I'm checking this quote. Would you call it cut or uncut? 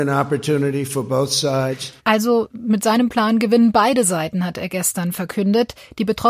cut